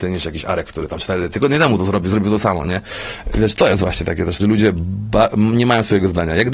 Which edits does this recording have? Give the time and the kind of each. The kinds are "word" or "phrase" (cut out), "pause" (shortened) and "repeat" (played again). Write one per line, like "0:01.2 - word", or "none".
0:04.4 - phrase